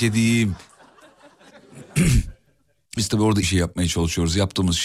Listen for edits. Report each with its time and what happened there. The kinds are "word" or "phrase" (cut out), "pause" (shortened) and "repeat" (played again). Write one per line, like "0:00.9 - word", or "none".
0:03.0 - word
0:03.4 - word